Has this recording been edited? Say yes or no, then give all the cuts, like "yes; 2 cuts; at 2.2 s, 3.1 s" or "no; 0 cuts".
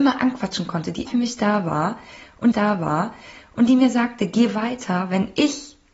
yes; 2 cuts; at 1.1 s, 2.5 s